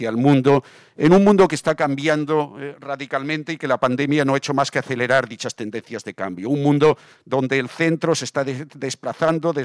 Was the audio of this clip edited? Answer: no; 0 cuts

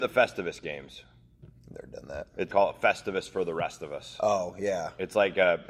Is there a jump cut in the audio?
yes; 1 cut; at 2.5 s

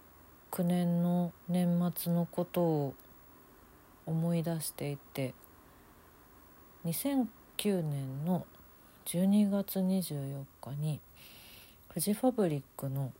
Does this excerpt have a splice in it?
yes; 1 cut; at 1.4 s

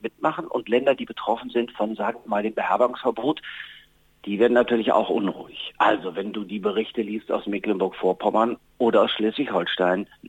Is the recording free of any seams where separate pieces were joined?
yes; 0 cuts

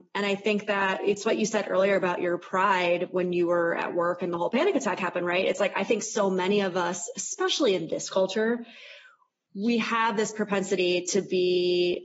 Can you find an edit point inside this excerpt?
no; 0 cuts

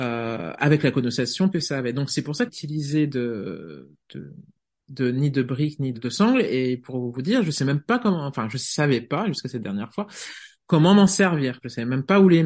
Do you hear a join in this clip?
yes; 5 cuts; at 1.5 s, 2.5 s, 4.1 s, 5.9 s, 10.5 s

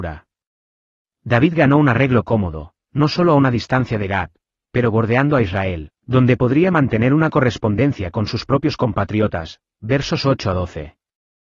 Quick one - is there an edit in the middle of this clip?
no; 0 cuts

